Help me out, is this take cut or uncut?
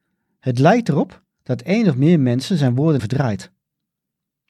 cut